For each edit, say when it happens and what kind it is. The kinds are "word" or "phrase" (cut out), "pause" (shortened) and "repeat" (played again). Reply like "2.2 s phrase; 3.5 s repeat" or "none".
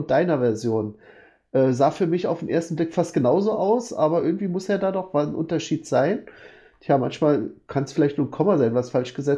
none

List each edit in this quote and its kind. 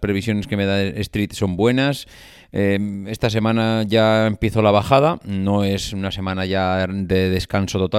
none

